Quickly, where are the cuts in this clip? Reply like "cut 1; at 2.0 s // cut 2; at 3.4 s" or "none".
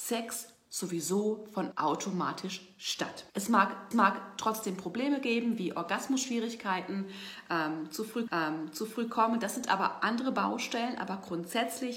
cut 1; at 1.7 s // cut 2; at 3.3 s // cut 3; at 3.9 s // cut 4; at 8.3 s